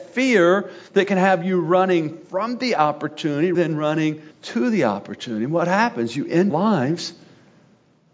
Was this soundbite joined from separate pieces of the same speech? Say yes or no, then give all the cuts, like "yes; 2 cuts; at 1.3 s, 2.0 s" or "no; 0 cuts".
yes; 3 cuts; at 3.5 s, 4.3 s, 6.5 s